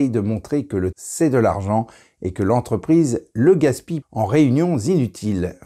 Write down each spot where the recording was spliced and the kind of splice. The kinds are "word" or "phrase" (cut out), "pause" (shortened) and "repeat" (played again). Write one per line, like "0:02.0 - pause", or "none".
0:00.9 - word
0:04.0 - word